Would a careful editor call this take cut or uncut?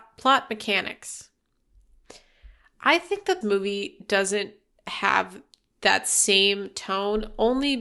cut